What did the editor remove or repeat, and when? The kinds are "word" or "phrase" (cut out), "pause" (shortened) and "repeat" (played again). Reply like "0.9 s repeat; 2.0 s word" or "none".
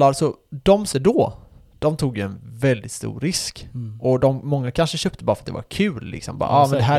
0.9 s word